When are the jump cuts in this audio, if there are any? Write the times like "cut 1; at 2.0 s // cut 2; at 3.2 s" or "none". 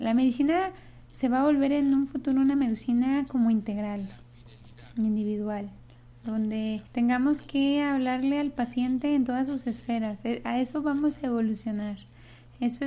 cut 1; at 1.0 s // cut 2; at 6.9 s